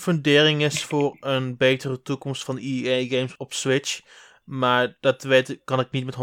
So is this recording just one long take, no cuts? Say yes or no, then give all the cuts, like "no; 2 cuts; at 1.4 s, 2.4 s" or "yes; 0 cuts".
no; 1 cut; at 3.4 s